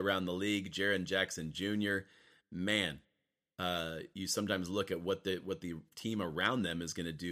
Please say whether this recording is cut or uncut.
uncut